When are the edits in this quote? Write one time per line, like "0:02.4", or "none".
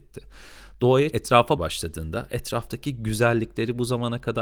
0:01.1
0:01.6